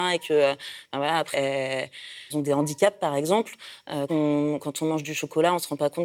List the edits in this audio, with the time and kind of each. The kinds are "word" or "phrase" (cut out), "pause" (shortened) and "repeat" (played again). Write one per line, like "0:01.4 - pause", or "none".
0:01.3 - word
0:02.3 - word
0:04.1 - word